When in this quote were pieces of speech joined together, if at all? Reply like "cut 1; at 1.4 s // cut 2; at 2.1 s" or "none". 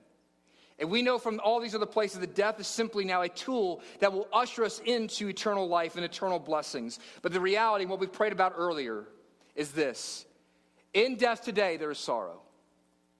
cut 1; at 11.9 s